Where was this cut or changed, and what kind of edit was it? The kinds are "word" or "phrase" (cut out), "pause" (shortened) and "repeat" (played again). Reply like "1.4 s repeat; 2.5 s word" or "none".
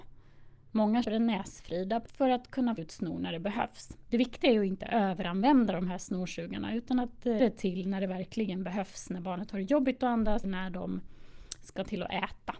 1.0 s word; 2.1 s word; 2.8 s word; 7.4 s word; 10.4 s word